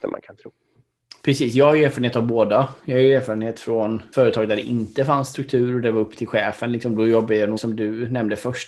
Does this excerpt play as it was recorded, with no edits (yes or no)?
no